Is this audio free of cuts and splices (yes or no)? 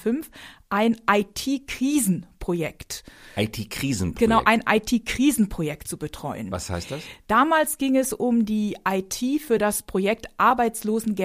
yes